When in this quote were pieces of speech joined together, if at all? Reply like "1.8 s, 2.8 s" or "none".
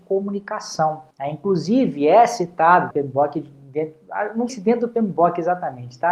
1.1 s, 2.9 s, 4.5 s